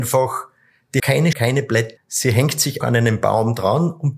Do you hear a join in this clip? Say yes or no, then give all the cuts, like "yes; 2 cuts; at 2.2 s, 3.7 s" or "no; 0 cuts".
yes; 4 cuts; at 1.0 s, 1.3 s, 2.0 s, 2.8 s